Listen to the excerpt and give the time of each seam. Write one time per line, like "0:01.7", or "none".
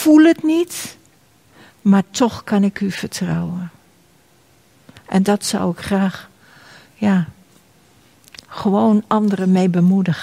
none